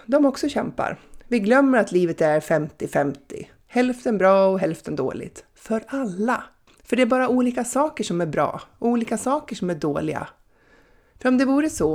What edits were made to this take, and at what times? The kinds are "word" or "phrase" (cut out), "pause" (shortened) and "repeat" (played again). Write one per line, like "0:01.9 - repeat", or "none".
0:06.7 - pause